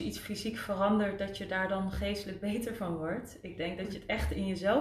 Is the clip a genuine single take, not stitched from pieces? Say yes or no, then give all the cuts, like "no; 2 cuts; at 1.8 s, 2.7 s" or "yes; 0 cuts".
yes; 0 cuts